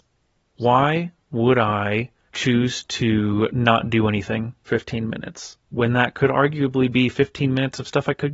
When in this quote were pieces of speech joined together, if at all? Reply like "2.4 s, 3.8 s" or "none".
4.7 s, 5.6 s